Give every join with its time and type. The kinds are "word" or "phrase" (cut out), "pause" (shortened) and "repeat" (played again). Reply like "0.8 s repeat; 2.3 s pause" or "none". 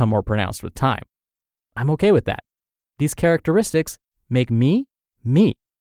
none